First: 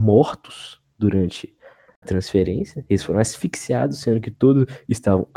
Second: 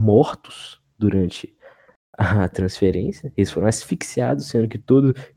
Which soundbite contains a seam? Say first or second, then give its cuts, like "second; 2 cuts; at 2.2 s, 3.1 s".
first; 1 cut; at 2.0 s